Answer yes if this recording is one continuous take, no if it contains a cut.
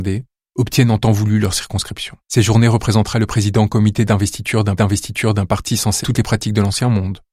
no